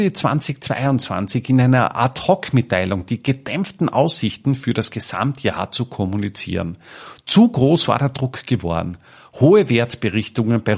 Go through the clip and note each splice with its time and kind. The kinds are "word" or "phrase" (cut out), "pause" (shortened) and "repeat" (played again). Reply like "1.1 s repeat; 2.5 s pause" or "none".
none